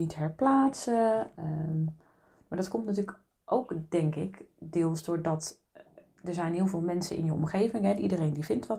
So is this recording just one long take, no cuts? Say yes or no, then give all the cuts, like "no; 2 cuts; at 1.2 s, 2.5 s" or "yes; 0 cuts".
yes; 0 cuts